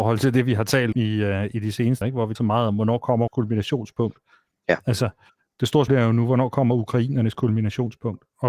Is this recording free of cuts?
no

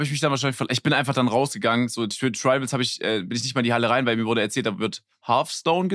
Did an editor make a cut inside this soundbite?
no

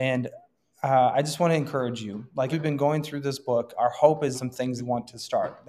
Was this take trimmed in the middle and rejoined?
yes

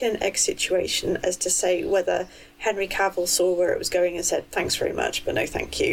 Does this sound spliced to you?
no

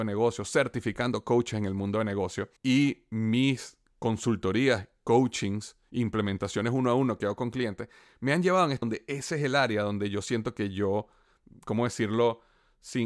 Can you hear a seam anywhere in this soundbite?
yes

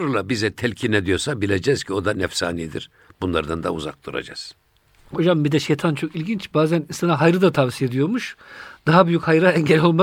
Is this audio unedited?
yes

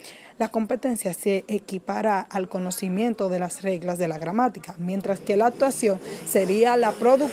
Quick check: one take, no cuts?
yes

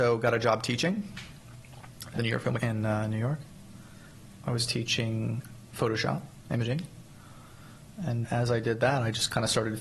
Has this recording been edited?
yes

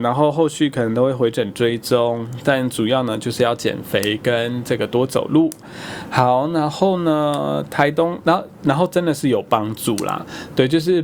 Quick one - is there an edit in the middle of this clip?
no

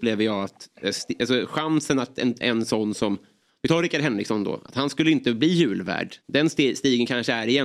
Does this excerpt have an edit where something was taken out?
no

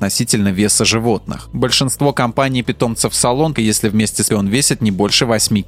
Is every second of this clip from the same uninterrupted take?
no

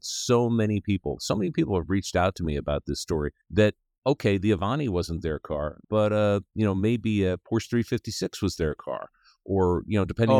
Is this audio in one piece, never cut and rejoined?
no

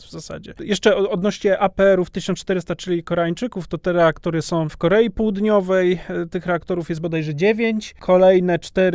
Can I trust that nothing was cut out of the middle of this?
no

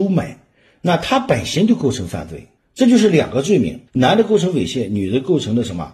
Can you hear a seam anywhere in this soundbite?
yes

